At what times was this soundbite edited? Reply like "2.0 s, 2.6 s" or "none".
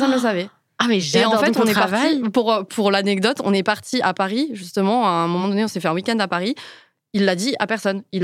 none